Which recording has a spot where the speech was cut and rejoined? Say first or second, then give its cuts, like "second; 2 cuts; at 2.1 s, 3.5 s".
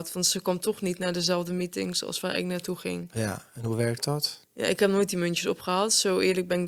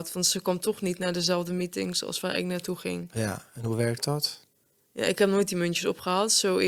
first; 1 cut; at 4.5 s